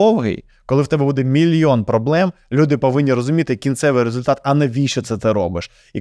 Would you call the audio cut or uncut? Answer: uncut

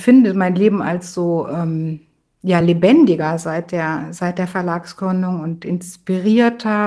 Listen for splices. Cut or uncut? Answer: uncut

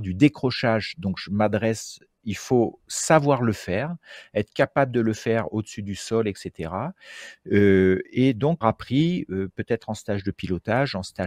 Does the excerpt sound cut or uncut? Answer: cut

